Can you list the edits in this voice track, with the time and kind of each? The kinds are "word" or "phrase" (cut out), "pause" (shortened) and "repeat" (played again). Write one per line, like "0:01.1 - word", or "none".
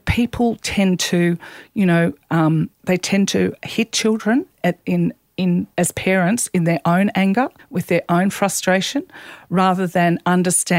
0:02.7 - pause
0:05.7 - pause
0:07.6 - pause